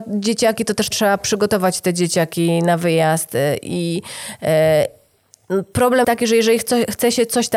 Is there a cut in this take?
yes; 2 cuts; at 0.9 s, 6.0 s

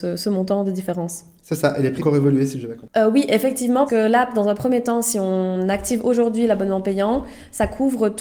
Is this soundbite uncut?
no; 2 cuts; at 2.0 s, 3.9 s

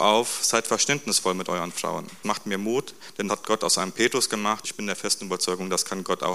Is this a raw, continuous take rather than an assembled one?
no; 3 cuts; at 2.2 s, 3.3 s, 4.6 s

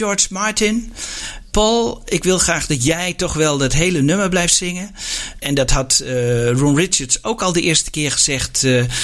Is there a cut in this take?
no; 0 cuts

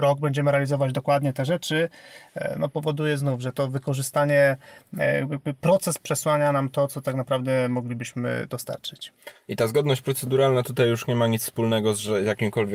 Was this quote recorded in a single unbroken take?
yes; 0 cuts

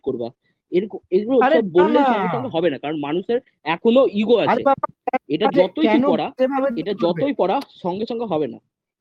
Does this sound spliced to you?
no; 0 cuts

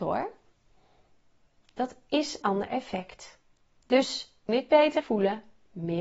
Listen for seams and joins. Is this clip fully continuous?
no; 3 cuts; at 2.4 s, 4.5 s, 5.0 s

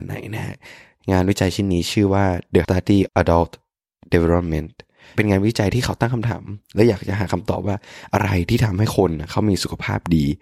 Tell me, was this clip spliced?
yes; 2 cuts; at 2.6 s, 3.1 s

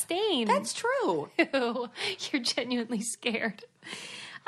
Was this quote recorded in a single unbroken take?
yes; 0 cuts

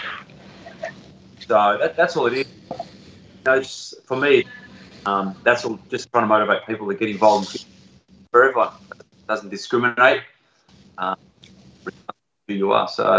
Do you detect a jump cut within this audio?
no; 0 cuts

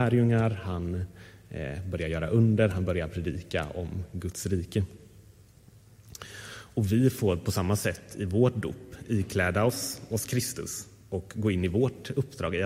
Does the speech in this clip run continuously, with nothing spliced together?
yes; 0 cuts

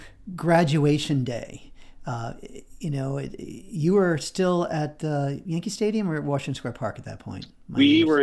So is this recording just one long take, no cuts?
yes; 0 cuts

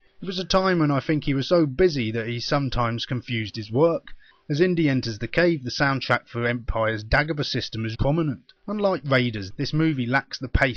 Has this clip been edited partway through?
yes; 2 cuts; at 8.0 s, 8.6 s

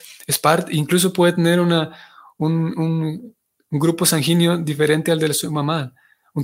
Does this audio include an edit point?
no; 0 cuts

